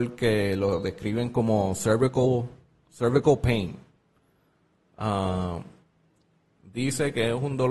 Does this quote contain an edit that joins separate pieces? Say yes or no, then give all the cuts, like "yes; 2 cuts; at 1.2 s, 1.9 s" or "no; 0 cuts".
no; 0 cuts